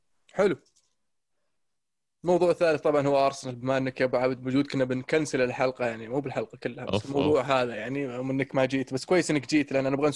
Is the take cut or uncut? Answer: uncut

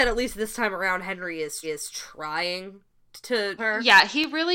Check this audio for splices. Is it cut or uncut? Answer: cut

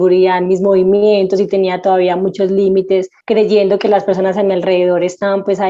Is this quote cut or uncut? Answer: cut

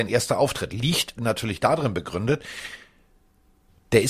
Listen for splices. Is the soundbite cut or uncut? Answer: cut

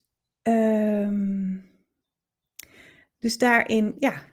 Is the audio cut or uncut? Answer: uncut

